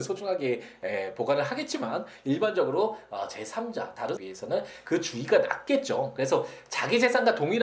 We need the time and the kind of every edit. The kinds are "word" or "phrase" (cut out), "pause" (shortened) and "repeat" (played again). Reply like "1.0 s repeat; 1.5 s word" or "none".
4.2 s phrase

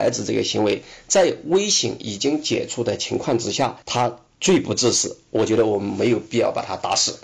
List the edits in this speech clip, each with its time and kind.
3.8 s pause

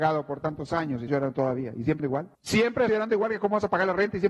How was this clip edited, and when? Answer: 1.1 s word; 2.0 s phrase; 2.3 s pause; 2.9 s word

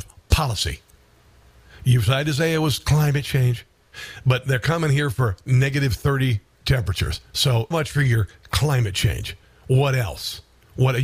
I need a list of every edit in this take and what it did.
7.7 s word

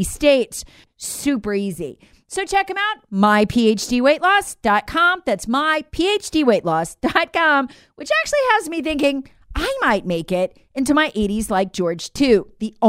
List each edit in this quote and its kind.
none

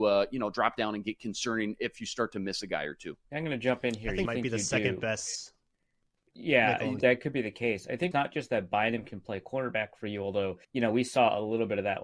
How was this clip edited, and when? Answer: 3.2 s pause; 4.2 s phrase; 7.0 s word; 8.1 s word; 10.6 s pause

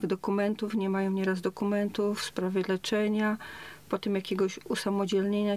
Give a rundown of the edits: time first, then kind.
none

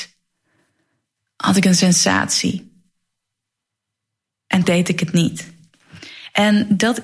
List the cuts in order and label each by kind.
4.6 s word

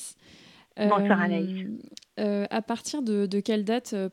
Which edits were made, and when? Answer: 2.1 s pause

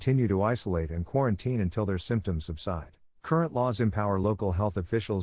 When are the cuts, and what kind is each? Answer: 3.1 s pause

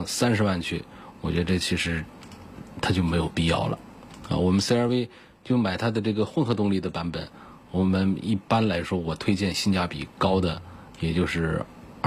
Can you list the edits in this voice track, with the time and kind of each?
none

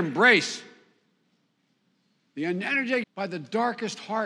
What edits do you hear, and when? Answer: 3.0 s phrase

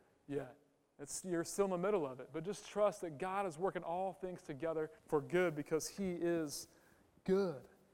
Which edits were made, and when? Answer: 5.0 s pause

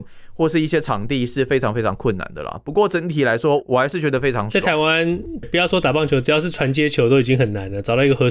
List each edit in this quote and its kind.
5.4 s word

